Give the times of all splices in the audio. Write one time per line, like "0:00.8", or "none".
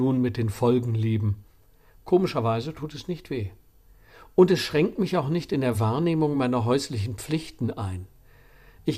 none